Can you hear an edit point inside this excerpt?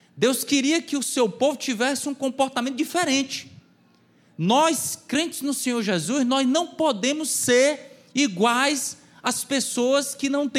no; 0 cuts

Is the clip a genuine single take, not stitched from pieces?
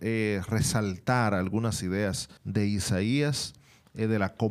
no; 1 cut; at 2.4 s

